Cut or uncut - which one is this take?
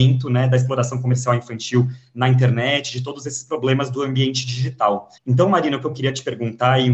cut